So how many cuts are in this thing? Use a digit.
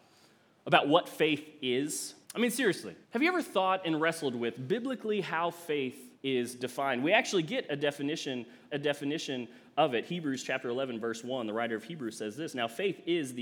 4